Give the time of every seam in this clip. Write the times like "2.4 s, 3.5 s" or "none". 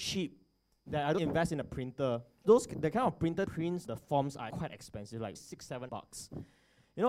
1.2 s, 2.4 s, 3.5 s, 3.9 s, 4.5 s, 5.4 s, 5.9 s

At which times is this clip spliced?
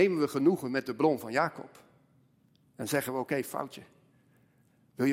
none

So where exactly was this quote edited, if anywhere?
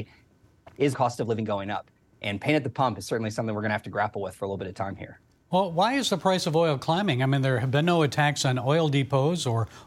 0.9 s

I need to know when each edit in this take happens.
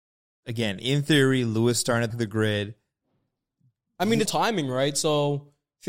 2.1 s, 4.3 s

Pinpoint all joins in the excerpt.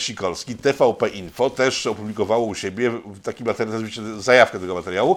none

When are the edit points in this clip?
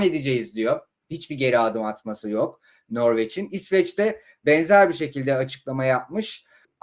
none

